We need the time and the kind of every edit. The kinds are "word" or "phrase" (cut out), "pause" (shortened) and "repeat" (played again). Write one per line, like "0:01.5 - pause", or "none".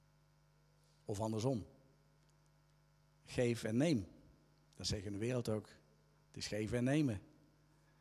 none